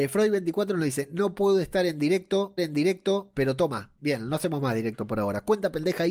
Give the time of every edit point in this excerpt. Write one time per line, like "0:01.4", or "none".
0:02.6
0:04.0

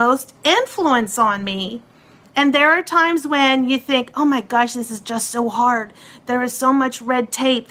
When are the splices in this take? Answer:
none

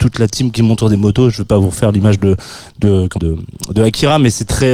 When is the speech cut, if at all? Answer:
0:03.2

